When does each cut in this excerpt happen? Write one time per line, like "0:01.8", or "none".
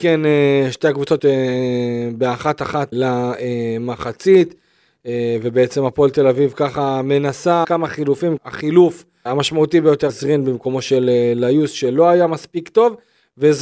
0:01.2
0:02.9
0:07.6
0:08.4
0:09.3
0:10.1